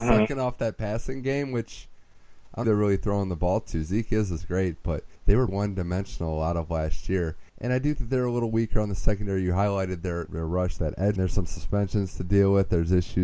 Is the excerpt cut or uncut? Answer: cut